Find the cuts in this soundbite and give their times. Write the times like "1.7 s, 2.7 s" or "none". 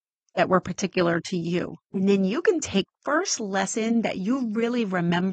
1.8 s, 2.9 s